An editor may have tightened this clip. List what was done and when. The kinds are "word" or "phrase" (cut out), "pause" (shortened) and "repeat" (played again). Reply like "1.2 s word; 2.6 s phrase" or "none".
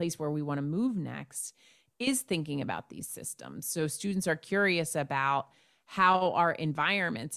none

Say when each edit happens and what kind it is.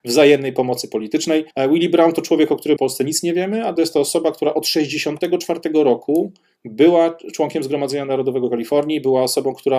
1.5 s pause; 2.8 s phrase; 3.8 s phrase; 6.6 s word

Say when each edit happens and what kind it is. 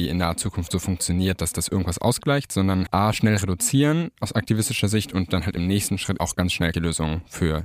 2.9 s word; 6.2 s word; 6.7 s phrase

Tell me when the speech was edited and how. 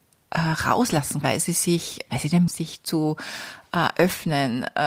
1.2 s word; 2.1 s word; 2.5 s phrase

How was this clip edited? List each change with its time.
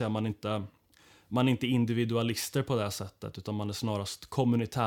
0.9 s pause

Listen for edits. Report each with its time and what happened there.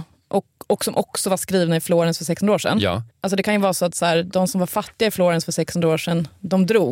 3.1 s pause

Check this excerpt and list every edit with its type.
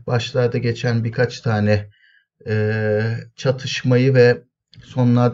none

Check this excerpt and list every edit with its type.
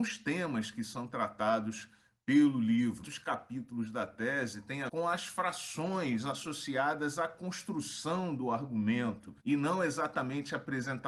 3.0 s word; 4.9 s word; 9.4 s pause

